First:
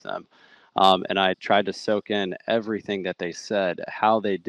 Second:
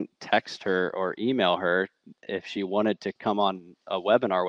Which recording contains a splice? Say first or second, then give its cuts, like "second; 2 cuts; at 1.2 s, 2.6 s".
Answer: first; 1 cut; at 1.3 s